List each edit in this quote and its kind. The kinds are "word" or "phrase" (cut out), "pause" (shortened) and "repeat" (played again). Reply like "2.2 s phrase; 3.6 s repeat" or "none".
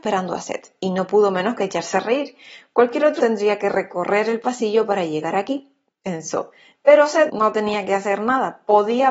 3.2 s word; 7.3 s word